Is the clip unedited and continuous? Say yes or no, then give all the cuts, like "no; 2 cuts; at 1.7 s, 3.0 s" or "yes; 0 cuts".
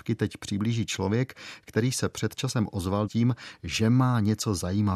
no; 1 cut; at 3.1 s